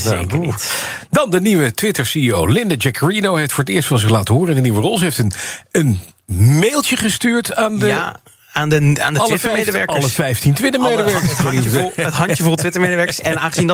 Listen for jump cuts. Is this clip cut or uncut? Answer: uncut